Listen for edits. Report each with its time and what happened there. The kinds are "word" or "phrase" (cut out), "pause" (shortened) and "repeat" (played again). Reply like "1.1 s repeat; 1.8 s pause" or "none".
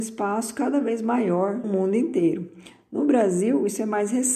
1.6 s word